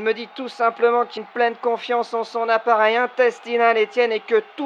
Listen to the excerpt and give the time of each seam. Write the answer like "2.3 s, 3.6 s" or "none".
1.2 s